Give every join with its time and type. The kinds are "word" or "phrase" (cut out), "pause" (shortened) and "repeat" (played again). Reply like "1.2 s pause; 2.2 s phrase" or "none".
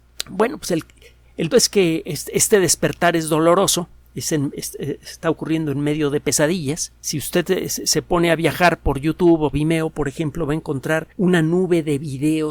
1.5 s word; 7.0 s pause; 9.5 s word; 11.1 s pause